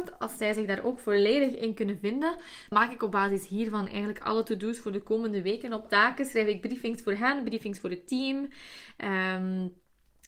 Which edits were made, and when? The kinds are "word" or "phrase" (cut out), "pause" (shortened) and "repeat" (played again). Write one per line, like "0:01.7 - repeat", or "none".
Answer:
0:02.7 - word
0:05.9 - word